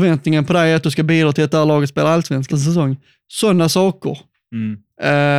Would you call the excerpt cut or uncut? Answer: cut